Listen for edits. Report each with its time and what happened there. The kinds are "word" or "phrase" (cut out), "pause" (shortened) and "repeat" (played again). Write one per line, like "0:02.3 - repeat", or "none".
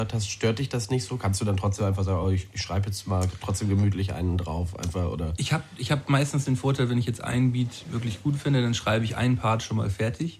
none